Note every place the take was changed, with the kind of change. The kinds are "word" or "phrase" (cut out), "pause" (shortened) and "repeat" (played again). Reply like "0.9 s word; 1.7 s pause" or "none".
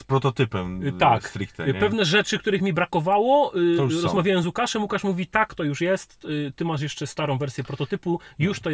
none